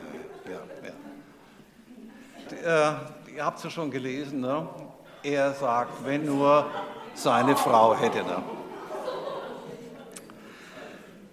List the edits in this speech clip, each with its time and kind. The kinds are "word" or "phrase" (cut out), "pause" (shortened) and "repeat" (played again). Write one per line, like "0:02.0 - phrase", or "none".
0:02.4 - word
0:06.2 - word